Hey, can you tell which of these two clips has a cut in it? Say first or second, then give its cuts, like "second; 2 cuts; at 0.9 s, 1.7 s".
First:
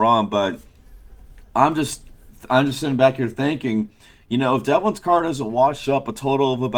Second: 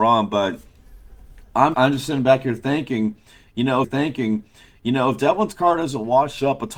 second; 2 cuts; at 1.7 s, 3.8 s